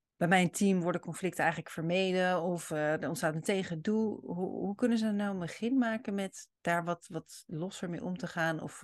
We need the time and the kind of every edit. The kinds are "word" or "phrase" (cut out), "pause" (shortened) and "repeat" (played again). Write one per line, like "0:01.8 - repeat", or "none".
0:06.6 - pause